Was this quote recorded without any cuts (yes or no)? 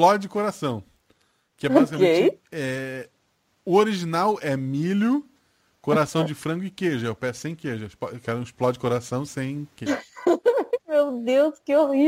yes